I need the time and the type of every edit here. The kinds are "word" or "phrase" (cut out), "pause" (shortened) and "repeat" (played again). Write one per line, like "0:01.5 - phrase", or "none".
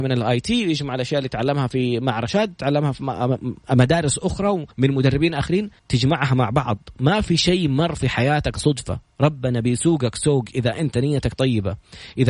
0:04.7 - pause
0:05.8 - pause